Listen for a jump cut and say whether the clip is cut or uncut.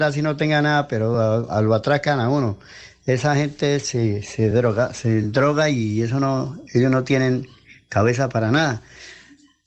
uncut